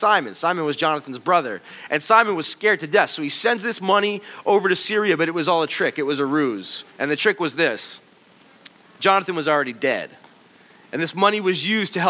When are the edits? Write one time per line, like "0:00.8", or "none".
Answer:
0:06.9